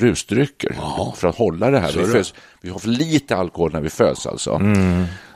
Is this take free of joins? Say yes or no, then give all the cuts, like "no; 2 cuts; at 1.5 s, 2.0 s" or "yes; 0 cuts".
yes; 0 cuts